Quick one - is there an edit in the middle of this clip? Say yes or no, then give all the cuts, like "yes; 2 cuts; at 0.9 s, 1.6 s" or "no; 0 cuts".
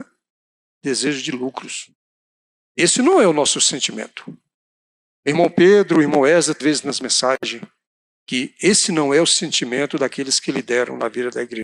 yes; 1 cut; at 6.6 s